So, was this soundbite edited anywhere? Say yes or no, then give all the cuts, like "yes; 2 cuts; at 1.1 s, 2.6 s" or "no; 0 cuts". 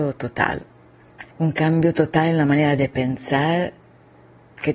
yes; 1 cut; at 1.3 s